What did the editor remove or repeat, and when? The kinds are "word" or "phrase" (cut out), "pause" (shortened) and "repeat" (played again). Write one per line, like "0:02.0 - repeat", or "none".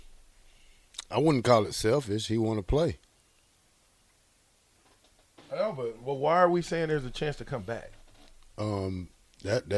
none

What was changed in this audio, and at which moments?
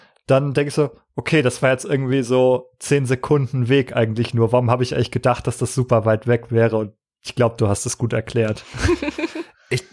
none

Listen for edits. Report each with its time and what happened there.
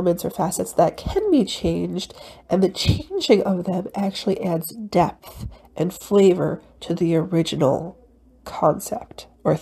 none

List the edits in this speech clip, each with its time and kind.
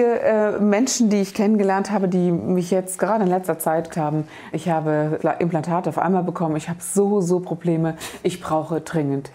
0:03.9 - word
0:04.5 - word
0:05.2 - word

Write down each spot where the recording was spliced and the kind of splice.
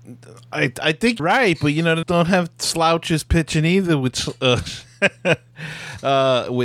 0:01.2 - word
0:02.0 - word

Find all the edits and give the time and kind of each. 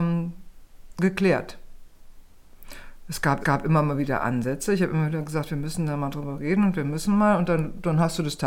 0:03.4 - repeat

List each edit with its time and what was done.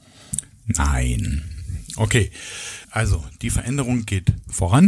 0:02.8 - word

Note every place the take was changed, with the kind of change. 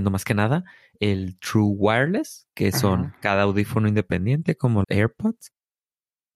0:04.8 - word

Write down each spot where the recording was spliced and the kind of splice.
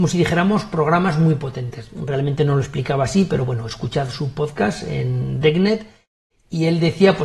none

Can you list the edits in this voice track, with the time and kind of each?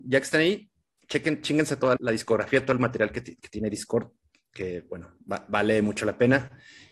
0:02.0 - word

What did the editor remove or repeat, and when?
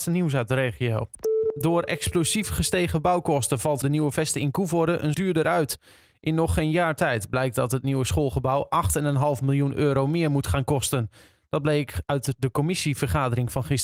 0:03.8 - phrase
0:05.1 - word

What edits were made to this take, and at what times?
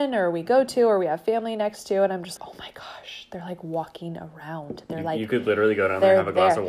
0:02.4 - word

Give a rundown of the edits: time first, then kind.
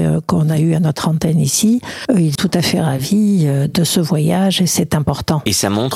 0:02.3 - word

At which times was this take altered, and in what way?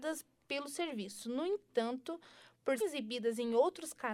0:02.8 - word

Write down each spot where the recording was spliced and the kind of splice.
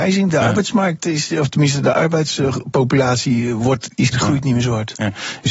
0:04.1 - word

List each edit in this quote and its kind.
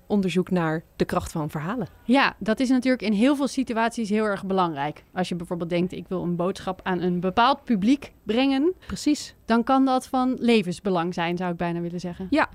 0:08.8 - pause

